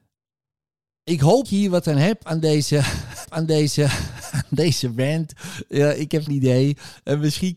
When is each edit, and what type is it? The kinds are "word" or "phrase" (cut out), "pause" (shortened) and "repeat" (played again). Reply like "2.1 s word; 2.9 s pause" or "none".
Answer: 1.4 s word; 3.2 s repeat; 6.3 s word